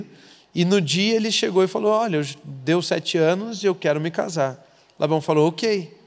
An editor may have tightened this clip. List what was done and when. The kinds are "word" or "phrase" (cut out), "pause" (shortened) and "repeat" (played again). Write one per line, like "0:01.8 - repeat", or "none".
none

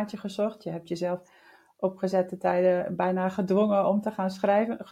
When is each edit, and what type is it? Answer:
none

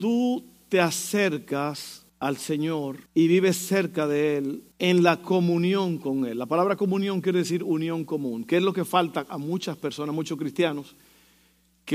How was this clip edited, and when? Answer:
0:02.1 - pause
0:03.1 - pause
0:04.7 - pause

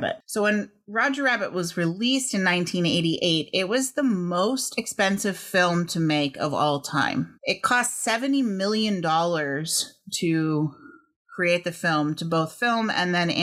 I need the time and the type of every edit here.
none

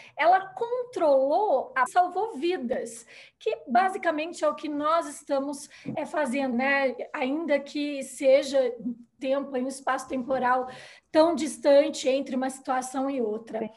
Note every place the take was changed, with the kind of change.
0:01.9 - phrase
0:05.9 - word
0:06.5 - word
0:09.2 - phrase

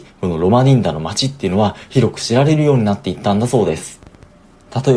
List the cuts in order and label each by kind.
none

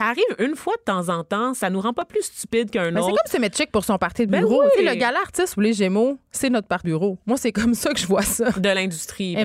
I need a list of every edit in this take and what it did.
0:06.8 - word

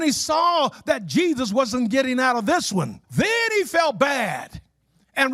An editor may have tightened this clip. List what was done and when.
0:03.0 - pause

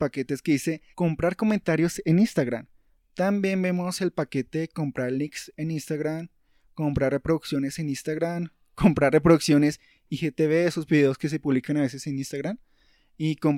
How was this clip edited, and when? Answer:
0:00.9 - pause

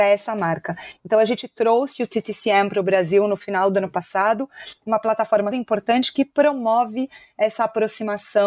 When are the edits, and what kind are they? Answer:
0:05.5 - word

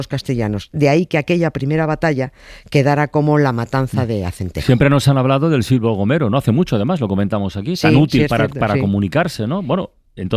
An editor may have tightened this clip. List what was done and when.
none

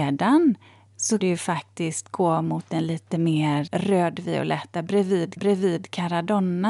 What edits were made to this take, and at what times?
0:01.2 - word
0:03.7 - word
0:05.4 - repeat

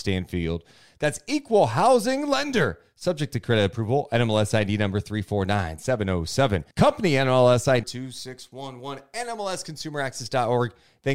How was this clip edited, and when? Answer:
0:06.7 - pause
0:07.8 - word

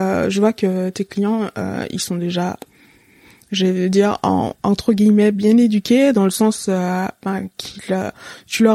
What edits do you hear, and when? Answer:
none

